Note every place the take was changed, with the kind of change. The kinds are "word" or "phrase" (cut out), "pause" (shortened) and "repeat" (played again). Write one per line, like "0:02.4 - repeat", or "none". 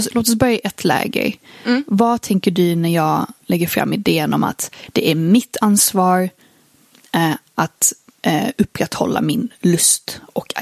none